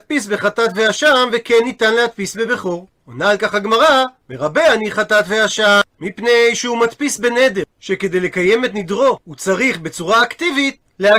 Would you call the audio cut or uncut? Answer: uncut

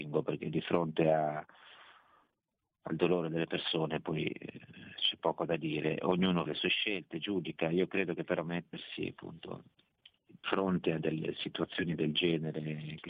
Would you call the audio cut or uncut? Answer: cut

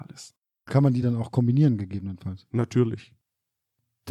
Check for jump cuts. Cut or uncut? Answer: uncut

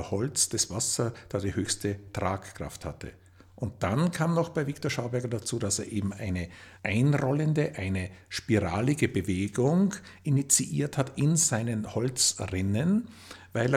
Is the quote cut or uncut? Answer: uncut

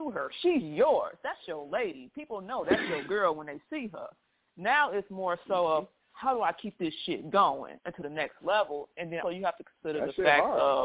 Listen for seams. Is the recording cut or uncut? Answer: cut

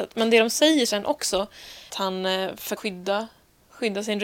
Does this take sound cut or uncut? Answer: cut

